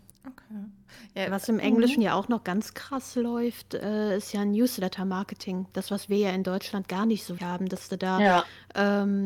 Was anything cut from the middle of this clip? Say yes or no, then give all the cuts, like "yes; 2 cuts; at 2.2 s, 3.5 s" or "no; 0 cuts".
yes; 1 cut; at 7.4 s